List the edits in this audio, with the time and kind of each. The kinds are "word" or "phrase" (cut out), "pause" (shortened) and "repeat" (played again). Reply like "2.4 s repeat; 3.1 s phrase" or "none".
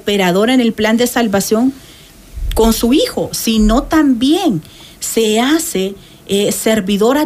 none

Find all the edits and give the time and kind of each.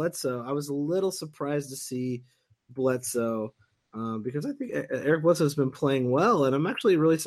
none

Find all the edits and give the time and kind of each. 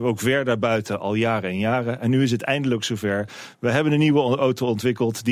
none

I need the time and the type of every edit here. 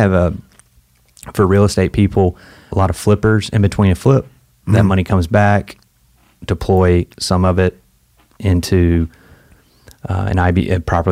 none

